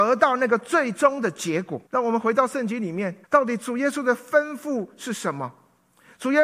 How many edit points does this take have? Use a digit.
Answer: 2